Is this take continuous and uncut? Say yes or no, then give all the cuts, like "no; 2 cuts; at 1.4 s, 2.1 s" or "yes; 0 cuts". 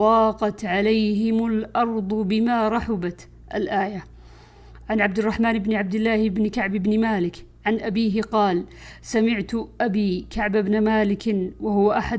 yes; 0 cuts